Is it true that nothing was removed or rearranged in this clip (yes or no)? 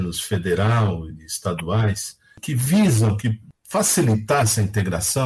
yes